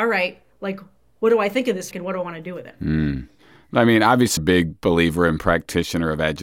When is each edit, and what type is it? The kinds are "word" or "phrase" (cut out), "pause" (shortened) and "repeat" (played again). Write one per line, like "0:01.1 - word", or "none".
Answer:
0:01.9 - word
0:04.4 - word